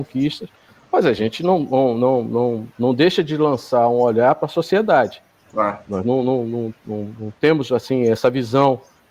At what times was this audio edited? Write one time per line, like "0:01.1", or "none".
none